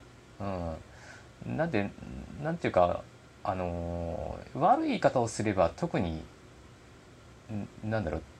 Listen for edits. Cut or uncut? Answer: uncut